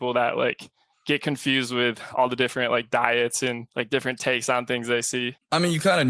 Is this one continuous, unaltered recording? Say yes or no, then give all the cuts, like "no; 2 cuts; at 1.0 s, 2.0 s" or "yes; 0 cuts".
no; 1 cut; at 3.7 s